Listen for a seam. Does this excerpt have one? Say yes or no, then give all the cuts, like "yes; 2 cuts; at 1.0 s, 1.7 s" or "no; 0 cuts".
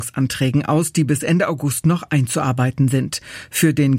no; 0 cuts